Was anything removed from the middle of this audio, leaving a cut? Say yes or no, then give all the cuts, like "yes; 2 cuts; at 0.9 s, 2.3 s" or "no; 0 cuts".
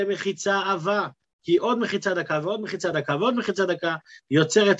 no; 0 cuts